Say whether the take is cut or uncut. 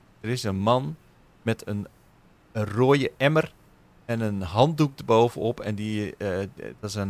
uncut